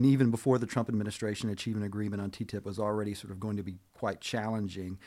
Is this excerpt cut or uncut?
uncut